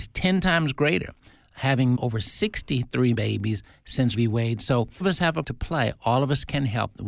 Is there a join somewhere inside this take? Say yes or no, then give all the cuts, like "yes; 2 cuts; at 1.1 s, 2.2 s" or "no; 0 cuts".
yes; 5 cuts; at 1.9 s, 3.1 s, 4.1 s, 5.0 s, 5.4 s